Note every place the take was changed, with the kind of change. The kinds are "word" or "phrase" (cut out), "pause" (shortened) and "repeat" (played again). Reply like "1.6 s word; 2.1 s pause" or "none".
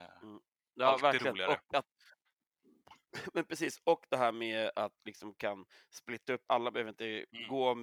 5.0 s word; 6.5 s word